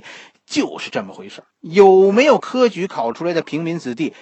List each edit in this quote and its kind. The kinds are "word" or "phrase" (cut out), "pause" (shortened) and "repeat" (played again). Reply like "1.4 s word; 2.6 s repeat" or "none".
1.5 s pause